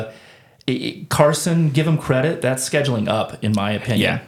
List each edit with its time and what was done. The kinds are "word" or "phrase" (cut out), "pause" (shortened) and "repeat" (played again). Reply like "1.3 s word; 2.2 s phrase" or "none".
none